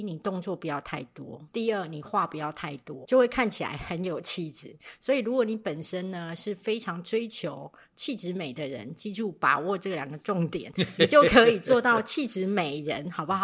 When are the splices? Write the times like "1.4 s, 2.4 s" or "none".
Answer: 1.5 s, 3.0 s